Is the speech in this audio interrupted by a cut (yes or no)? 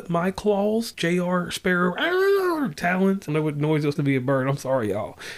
yes